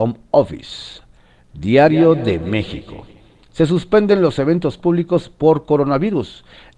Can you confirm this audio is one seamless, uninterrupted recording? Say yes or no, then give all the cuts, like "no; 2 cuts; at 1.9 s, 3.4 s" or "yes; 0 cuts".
yes; 0 cuts